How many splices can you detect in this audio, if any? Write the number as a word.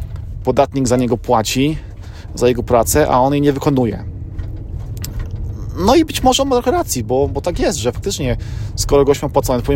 zero